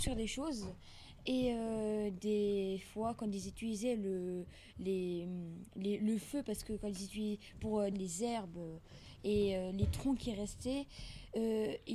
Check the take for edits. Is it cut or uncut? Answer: cut